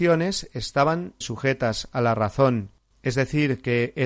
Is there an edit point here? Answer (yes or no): yes